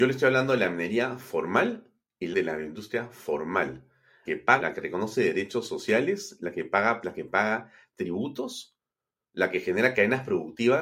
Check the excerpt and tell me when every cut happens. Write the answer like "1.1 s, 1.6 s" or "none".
2.3 s, 4.2 s, 4.6 s, 7.0 s